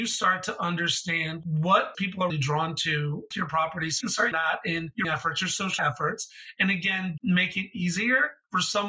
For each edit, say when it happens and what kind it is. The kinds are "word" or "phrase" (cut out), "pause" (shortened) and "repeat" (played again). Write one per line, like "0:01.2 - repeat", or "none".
0:01.9 - word
0:02.3 - word
0:03.3 - word
0:04.0 - word
0:04.3 - word
0:05.0 - word
0:05.8 - word
0:07.2 - word